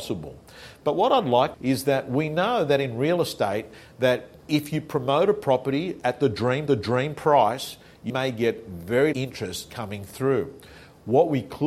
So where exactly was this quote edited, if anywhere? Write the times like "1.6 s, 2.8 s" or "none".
1.5 s, 6.7 s, 8.1 s, 9.1 s